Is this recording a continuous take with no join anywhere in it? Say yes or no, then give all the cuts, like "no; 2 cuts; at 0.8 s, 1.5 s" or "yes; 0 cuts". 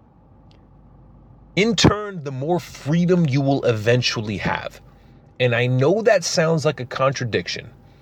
yes; 0 cuts